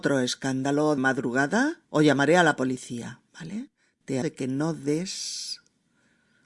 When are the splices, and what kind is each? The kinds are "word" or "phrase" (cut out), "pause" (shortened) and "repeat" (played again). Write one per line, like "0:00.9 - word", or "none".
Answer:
0:01.0 - word
0:01.8 - pause
0:03.3 - pause
0:04.2 - word